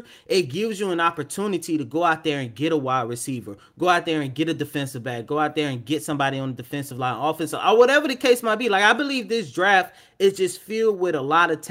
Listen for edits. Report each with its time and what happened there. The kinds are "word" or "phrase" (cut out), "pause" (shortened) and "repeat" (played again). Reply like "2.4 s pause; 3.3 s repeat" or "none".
none